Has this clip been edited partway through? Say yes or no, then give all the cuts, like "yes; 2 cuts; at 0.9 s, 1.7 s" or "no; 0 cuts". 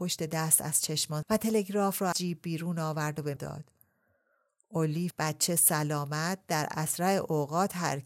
yes; 4 cuts; at 1.2 s, 2.1 s, 3.4 s, 5.1 s